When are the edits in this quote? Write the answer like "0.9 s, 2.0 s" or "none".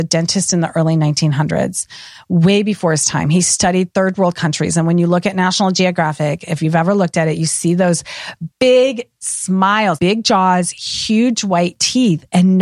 8.5 s, 10.0 s

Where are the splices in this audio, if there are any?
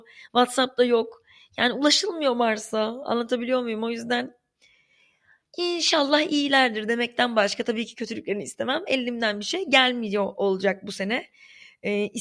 none

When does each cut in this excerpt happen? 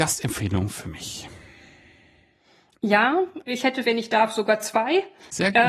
3.4 s, 3.8 s

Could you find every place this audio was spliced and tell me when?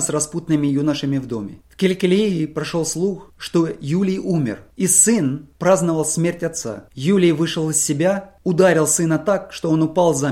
1.6 s, 6.9 s

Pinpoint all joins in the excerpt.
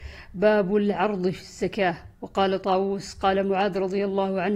2.1 s

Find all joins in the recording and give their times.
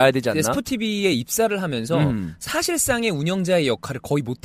none

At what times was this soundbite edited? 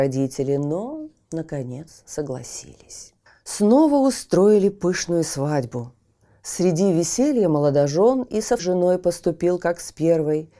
3.3 s, 8.6 s

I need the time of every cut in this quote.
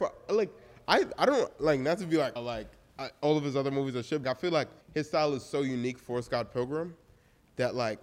2.4 s, 4.2 s, 4.8 s

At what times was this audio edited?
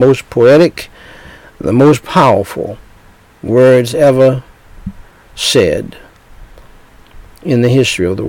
none

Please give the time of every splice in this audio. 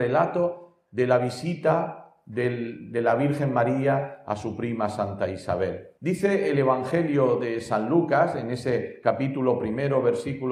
6.0 s

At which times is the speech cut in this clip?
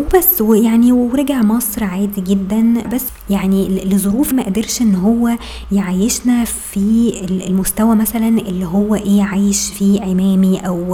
4.3 s

